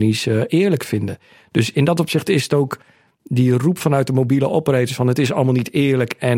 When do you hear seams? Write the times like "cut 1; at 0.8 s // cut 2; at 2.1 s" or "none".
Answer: none